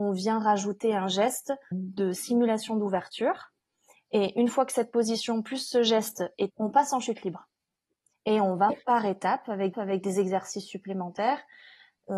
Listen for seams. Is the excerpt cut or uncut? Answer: cut